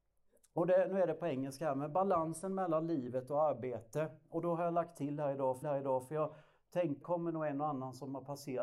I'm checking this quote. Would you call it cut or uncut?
cut